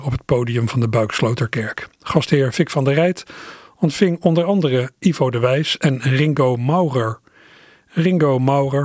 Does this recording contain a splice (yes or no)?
no